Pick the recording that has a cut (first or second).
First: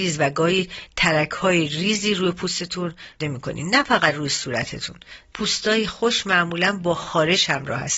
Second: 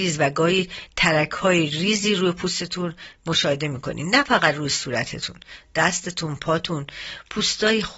first